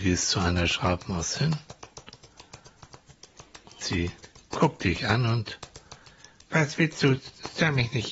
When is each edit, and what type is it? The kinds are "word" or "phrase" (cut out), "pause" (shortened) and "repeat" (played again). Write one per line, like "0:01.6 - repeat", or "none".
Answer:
0:03.8 - word

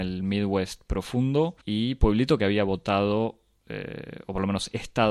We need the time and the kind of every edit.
0:01.6 - pause

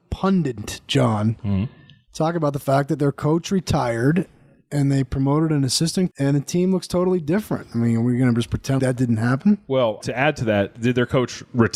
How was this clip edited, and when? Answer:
0:06.1 - word
0:08.8 - word
0:10.0 - word

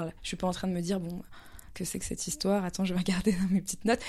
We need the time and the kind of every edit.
0:01.7 - word

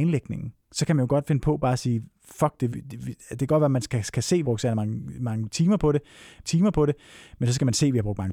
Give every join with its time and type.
0:02.7 - word
0:04.4 - phrase
0:06.4 - repeat

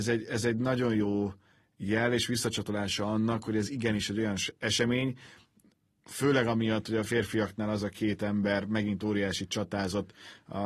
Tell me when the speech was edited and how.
none

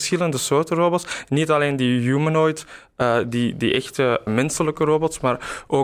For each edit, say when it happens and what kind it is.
0:04.3 - word

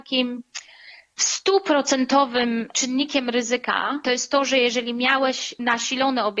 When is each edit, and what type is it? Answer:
none

